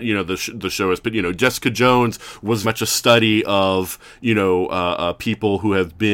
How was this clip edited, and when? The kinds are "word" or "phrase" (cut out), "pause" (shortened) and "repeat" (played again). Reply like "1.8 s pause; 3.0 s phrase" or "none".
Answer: 2.6 s word